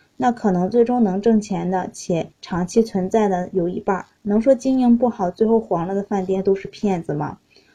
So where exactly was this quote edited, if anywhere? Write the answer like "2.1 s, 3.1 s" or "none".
2.3 s